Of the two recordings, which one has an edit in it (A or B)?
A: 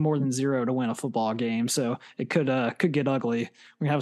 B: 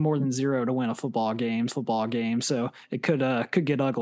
B